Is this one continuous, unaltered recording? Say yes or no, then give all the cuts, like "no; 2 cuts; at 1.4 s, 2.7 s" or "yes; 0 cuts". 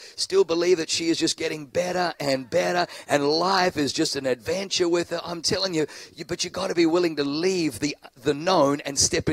yes; 0 cuts